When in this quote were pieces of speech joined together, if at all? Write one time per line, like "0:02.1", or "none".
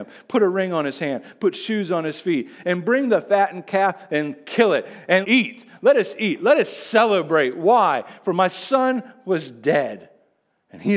0:05.2